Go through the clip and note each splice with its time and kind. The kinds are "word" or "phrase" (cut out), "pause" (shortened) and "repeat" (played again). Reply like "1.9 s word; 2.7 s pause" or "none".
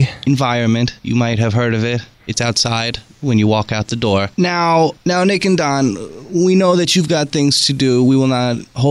1.0 s pause; 2.1 s pause